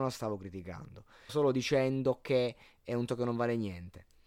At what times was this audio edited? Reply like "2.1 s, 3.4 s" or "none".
1.3 s, 3.1 s